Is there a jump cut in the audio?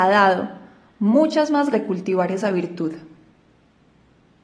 yes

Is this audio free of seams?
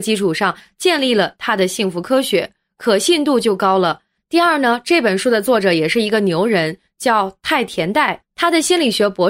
yes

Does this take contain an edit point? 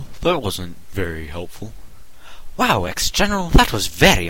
no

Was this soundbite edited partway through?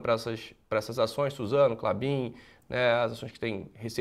no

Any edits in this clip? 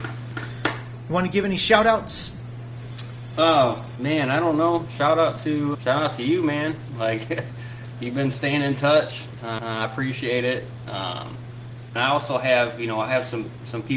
yes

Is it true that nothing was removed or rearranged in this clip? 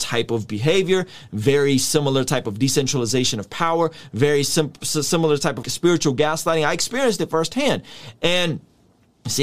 no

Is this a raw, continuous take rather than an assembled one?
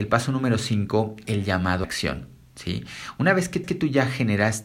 no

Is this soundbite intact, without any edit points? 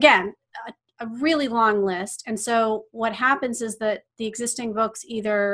yes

